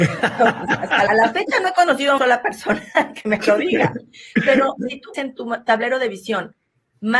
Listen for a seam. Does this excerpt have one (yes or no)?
yes